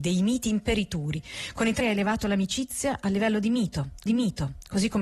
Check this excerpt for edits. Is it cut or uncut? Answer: cut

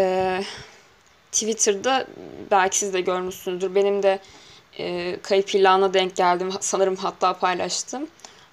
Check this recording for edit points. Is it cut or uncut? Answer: uncut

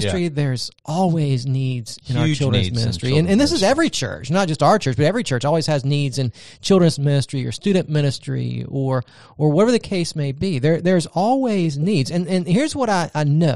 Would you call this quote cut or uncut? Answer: uncut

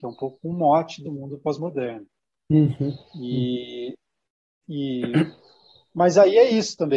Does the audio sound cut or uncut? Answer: cut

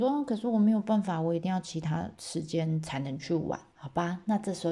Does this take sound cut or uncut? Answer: cut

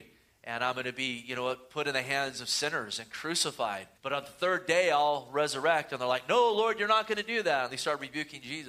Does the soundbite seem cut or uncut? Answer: cut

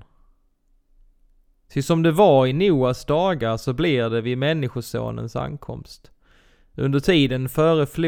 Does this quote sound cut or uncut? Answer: uncut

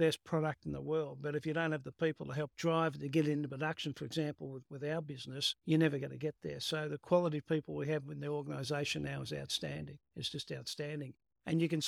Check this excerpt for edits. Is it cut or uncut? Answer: cut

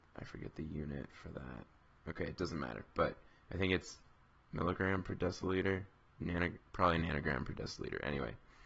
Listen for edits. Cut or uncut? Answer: uncut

